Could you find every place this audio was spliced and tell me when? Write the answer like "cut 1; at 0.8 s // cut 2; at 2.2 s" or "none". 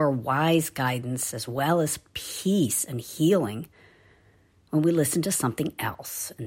none